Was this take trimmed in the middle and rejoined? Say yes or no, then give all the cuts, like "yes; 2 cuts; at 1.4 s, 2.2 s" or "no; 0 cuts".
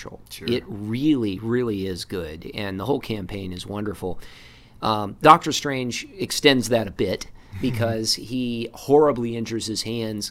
no; 0 cuts